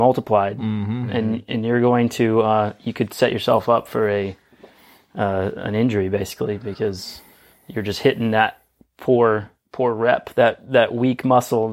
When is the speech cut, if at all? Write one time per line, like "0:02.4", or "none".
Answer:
none